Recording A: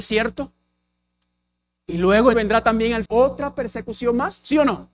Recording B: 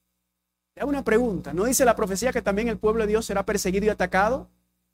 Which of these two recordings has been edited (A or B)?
A